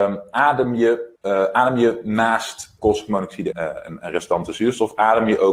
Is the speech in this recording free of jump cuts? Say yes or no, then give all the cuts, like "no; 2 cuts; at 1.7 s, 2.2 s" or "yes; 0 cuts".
no; 3 cuts; at 1.2 s, 2.8 s, 3.5 s